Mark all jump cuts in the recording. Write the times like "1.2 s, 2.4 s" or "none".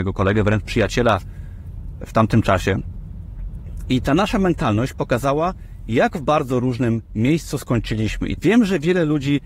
8.4 s

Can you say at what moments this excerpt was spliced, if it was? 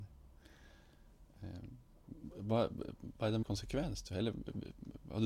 3.4 s

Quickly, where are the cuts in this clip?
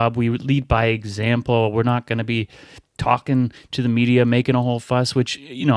none

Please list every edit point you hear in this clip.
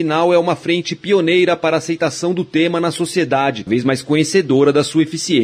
3.7 s

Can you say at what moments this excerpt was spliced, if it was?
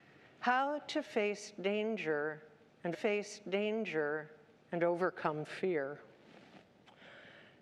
2.9 s

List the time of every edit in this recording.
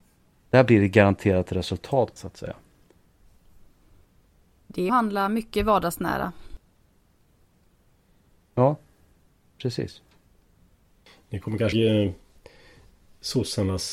2.2 s, 4.9 s, 11.7 s

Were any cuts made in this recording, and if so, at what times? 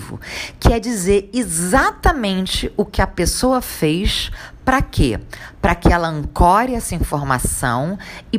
none

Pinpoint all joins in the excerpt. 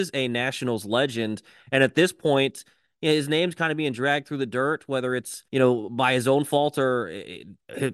5.5 s

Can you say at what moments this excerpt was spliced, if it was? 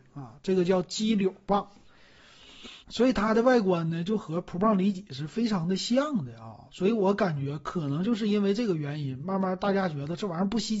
2.8 s

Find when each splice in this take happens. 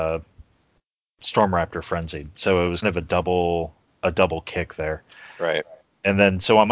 2.8 s

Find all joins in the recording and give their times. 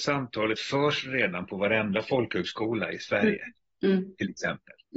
none

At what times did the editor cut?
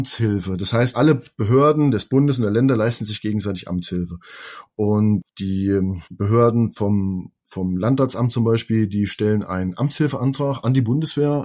0.9 s, 6.1 s

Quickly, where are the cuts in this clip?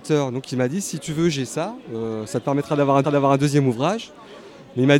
3.0 s

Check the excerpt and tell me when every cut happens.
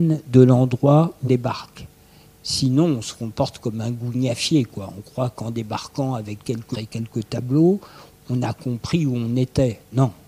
1.2 s, 6.7 s

